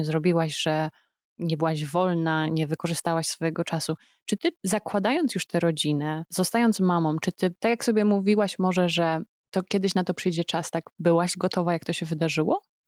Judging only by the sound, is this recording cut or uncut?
cut